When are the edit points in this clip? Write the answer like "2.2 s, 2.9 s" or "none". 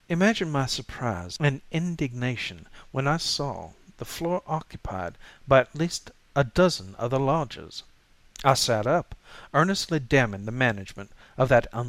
8.1 s

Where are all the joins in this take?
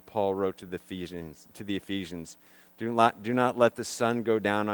none

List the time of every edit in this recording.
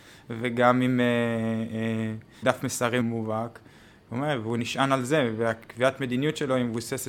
2.4 s, 3.0 s

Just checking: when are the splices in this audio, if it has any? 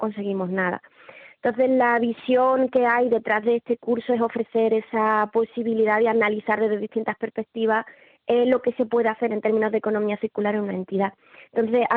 none

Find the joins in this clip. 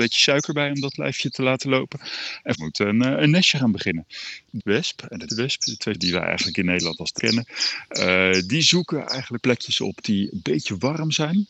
1.3 s, 2.5 s, 4.6 s, 5.3 s, 5.9 s, 7.2 s, 9.4 s

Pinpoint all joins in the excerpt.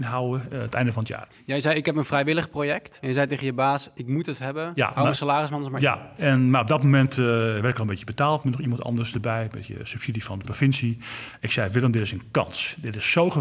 none

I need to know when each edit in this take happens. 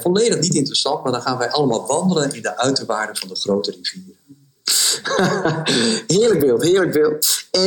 none

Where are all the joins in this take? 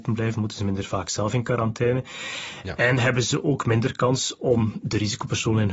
none

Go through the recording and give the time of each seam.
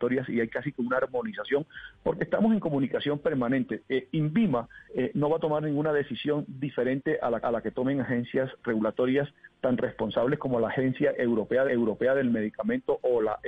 4.8 s, 7.4 s, 8.6 s, 11.7 s

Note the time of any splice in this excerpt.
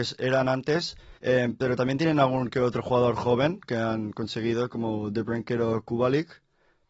1.2 s

